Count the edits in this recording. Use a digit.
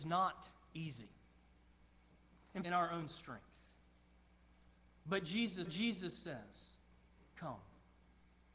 2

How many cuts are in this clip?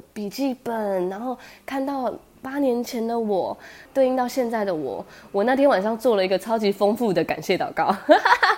0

